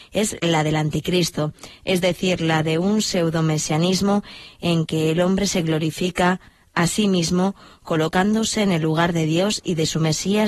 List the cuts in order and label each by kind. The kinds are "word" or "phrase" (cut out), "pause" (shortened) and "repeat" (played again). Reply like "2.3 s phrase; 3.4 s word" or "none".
none